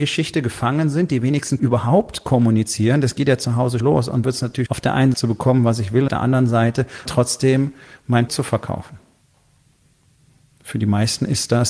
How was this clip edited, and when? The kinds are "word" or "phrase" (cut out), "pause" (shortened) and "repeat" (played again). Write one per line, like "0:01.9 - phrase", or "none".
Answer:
0:01.6 - word
0:03.8 - word
0:04.2 - word
0:04.7 - word
0:05.1 - word
0:06.1 - word
0:07.1 - word
0:08.3 - word